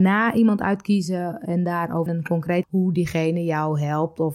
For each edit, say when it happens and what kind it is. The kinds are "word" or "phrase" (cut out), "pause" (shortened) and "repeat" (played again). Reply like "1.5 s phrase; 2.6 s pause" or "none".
2.1 s phrase; 2.6 s word